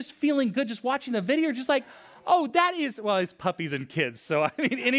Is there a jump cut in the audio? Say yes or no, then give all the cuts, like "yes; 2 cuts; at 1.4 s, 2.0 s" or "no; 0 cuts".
no; 0 cuts